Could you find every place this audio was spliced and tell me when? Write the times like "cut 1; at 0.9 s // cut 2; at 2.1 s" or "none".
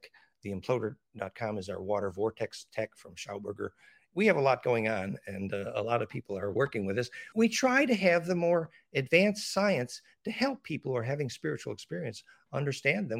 cut 1; at 7.3 s